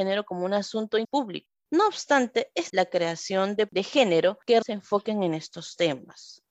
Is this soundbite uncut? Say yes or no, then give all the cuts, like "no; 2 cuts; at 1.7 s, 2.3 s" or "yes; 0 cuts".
no; 4 cuts; at 1.0 s, 2.7 s, 3.7 s, 4.6 s